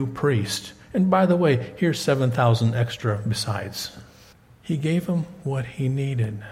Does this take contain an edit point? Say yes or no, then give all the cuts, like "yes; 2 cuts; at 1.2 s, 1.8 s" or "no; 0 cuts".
yes; 1 cut; at 4.3 s